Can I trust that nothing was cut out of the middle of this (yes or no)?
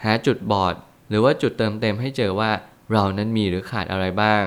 yes